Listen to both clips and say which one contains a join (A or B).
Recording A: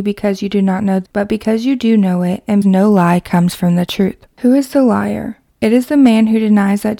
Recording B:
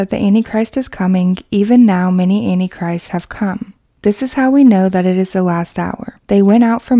A